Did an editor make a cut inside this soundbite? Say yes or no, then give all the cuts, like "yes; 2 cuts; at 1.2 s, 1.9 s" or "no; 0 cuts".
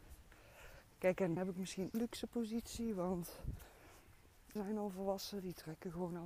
yes; 3 cuts; at 1.4 s, 1.9 s, 4.6 s